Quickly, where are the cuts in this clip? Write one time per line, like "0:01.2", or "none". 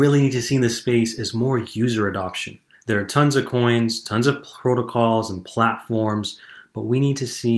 0:02.7